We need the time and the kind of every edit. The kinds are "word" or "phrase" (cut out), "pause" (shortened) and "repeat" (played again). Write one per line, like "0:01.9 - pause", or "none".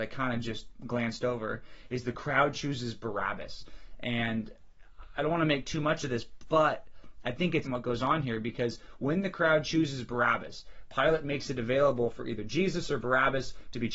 0:07.6 - word